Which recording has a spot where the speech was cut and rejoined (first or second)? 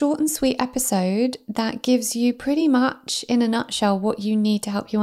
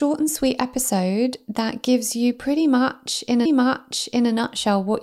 second